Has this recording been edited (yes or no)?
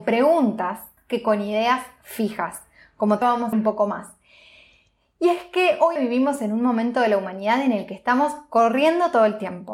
yes